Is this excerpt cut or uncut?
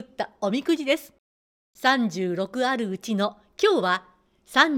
uncut